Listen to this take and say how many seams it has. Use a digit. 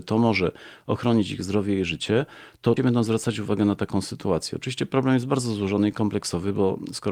1